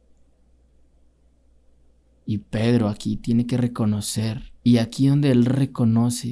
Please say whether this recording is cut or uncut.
cut